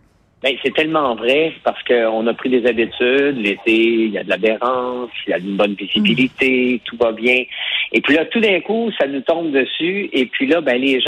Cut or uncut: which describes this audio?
uncut